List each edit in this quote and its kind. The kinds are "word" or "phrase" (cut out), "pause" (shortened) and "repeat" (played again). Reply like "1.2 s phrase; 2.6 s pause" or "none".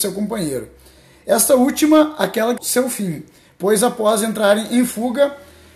2.6 s word